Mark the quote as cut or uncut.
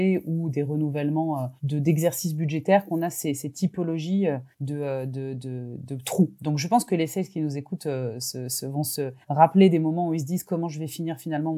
cut